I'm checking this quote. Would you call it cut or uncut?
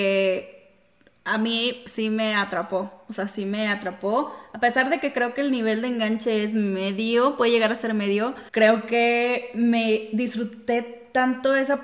cut